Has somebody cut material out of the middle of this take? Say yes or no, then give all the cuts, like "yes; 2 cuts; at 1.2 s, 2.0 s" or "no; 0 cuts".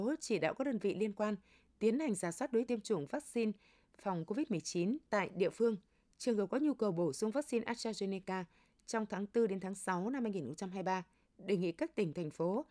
yes; 2 cuts; at 2.7 s, 5.1 s